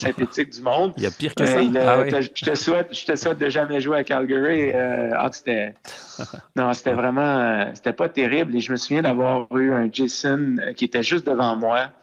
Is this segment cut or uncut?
cut